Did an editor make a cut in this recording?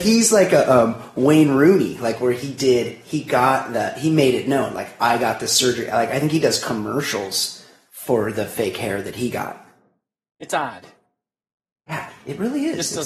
no; 0 cuts

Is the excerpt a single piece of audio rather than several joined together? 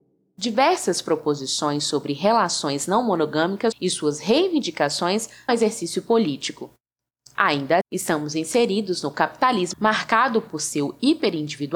no; 4 cuts; at 3.7 s, 5.5 s, 7.8 s, 9.7 s

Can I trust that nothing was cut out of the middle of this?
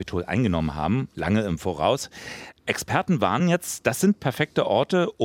yes; 0 cuts

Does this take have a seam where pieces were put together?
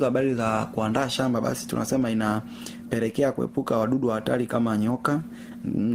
no; 0 cuts

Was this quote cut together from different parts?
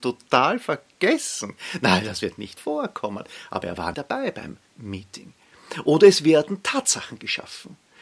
yes; 3 cuts; at 2.6 s, 3.9 s, 4.7 s

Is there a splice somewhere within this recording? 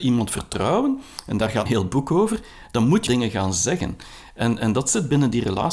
yes; 2 cuts; at 1.7 s, 3.1 s

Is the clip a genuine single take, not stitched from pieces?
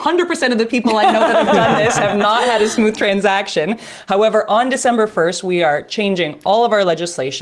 yes; 0 cuts

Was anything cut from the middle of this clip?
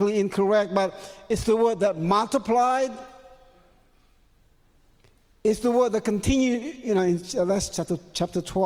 no; 0 cuts

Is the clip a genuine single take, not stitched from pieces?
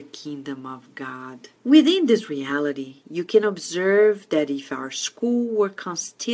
no; 1 cut; at 1.6 s

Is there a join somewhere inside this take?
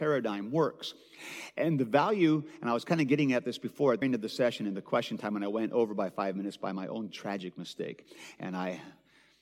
yes; 1 cut; at 4.0 s

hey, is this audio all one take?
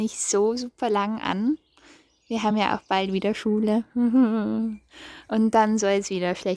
yes; 0 cuts

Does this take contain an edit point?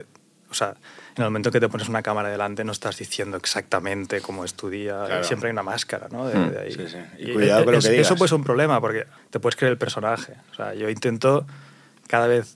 yes; 1 cut; at 9.2 s

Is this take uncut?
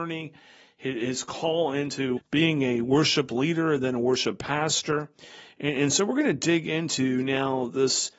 no; 1 cut; at 2.2 s

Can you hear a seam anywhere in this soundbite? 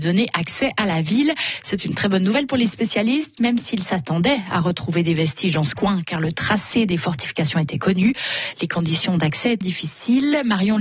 yes; 1 cut; at 9.6 s

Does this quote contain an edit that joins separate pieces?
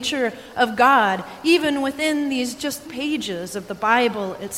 yes; 1 cut; at 2.8 s

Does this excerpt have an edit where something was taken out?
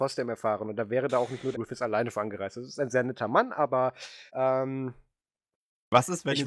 yes; 2 cuts; at 1.5 s, 4.3 s

